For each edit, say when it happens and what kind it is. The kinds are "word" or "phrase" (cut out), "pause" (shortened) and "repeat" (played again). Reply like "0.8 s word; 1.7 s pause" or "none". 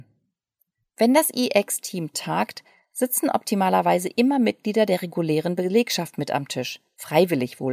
none